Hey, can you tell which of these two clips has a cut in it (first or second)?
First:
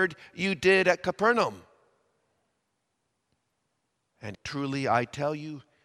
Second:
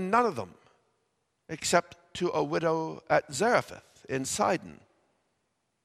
first